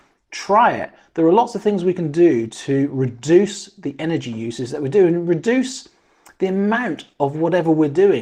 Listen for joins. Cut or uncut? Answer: uncut